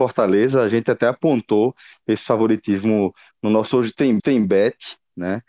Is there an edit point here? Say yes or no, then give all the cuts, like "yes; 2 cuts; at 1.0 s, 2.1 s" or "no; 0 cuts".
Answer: yes; 1 cut; at 4.2 s